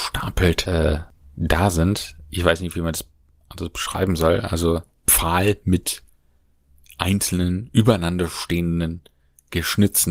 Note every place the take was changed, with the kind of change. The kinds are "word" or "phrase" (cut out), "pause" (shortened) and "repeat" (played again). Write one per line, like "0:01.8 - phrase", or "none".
0:01.2 - pause